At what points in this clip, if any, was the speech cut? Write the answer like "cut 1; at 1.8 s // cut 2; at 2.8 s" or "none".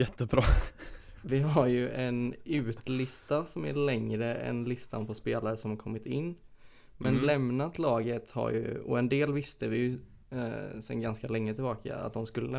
none